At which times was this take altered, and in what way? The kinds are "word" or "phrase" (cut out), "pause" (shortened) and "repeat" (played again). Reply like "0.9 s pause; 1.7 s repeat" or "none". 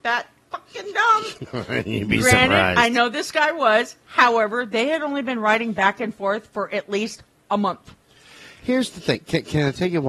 none